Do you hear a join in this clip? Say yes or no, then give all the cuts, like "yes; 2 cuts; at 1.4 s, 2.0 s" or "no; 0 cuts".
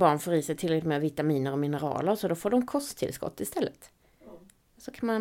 no; 0 cuts